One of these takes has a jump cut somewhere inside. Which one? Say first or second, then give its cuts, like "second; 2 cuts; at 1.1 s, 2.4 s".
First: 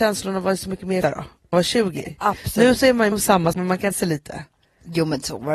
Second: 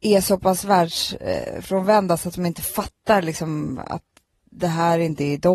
first; 5 cuts; at 1.0 s, 1.5 s, 3.1 s, 3.5 s, 3.9 s